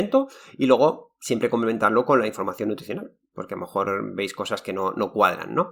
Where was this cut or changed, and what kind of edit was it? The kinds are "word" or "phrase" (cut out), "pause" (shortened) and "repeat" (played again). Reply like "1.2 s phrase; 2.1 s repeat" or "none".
none